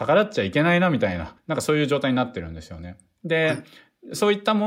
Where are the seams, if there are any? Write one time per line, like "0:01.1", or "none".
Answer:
0:01.4